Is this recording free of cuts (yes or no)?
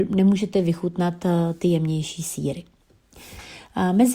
yes